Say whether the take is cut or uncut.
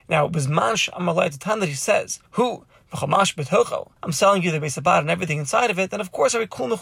cut